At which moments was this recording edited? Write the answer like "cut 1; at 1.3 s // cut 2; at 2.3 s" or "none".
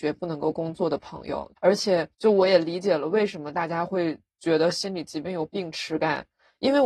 cut 1; at 1.6 s // cut 2; at 2.1 s